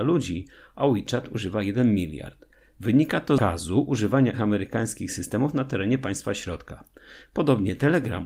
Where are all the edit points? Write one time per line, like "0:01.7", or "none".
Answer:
0:04.3